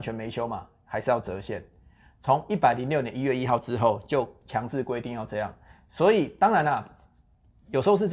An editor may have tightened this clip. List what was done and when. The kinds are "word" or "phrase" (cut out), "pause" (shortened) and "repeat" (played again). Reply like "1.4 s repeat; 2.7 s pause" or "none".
none